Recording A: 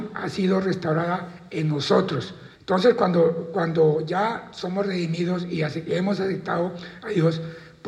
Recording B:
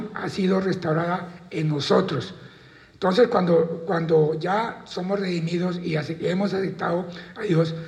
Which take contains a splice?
A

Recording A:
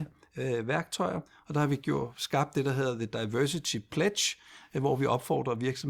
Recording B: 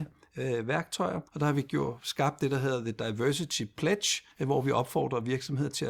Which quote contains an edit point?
B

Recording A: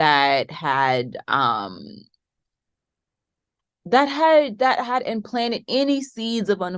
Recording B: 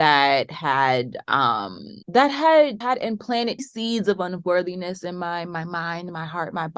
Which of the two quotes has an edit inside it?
B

